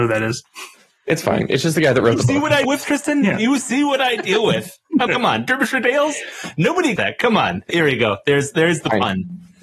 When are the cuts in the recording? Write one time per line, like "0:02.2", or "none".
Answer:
0:02.6
0:05.1
0:07.0
0:07.7